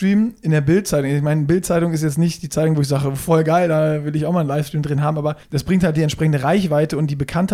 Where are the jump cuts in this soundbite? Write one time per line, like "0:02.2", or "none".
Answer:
0:05.4